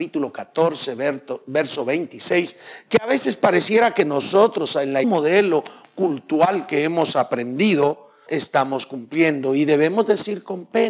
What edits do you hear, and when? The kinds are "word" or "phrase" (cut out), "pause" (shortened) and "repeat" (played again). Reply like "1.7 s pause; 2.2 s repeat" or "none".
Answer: 5.0 s phrase; 8.3 s word